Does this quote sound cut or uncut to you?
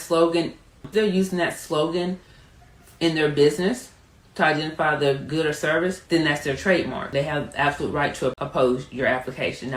cut